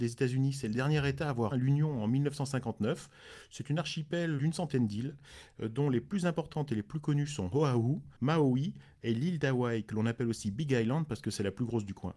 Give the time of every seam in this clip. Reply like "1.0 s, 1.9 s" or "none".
1.5 s, 4.4 s, 8.2 s